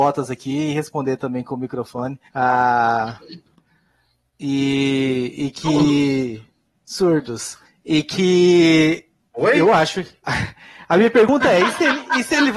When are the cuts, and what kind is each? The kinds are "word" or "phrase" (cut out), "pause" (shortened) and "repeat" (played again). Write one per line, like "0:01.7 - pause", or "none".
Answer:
0:02.3 - pause
0:07.6 - pause
0:09.2 - pause
0:10.2 - pause